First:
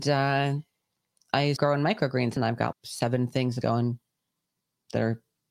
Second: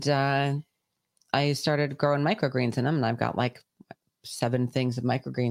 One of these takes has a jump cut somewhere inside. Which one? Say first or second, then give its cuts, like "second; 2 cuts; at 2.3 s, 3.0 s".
first; 4 cuts; at 1.6 s, 2.4 s, 2.7 s, 3.6 s